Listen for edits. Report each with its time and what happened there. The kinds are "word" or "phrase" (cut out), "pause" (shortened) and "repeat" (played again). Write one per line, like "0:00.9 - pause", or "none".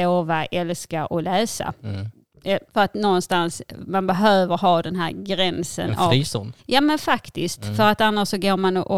0:02.7 - pause
0:06.6 - pause